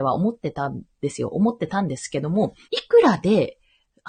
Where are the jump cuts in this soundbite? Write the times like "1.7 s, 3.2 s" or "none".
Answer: 2.6 s